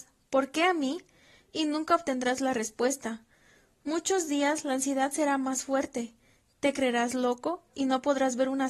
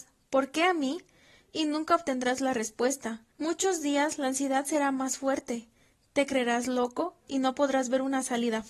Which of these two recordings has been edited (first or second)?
second